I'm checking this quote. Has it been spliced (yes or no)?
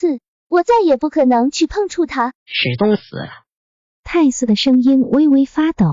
yes